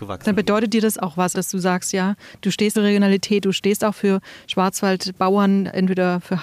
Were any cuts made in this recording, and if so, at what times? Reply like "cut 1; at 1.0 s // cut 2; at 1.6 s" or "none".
cut 1; at 1.3 s // cut 2; at 2.7 s